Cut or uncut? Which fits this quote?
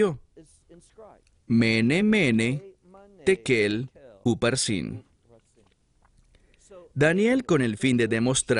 uncut